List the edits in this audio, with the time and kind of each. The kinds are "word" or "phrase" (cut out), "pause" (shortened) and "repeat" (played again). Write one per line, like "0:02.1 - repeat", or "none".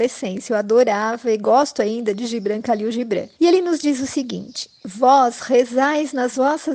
0:03.3 - pause

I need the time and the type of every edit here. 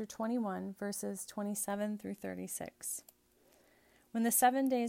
none

